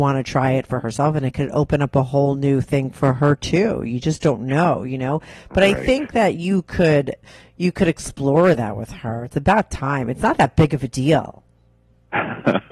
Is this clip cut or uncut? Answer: uncut